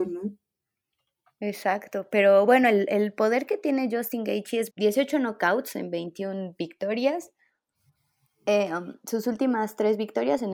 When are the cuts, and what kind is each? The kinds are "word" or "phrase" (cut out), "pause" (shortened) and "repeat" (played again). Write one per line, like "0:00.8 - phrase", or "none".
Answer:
0:04.7 - phrase